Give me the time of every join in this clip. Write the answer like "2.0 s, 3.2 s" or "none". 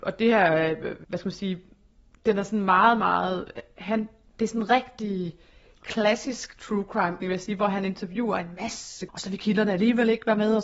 1.0 s, 7.2 s, 9.1 s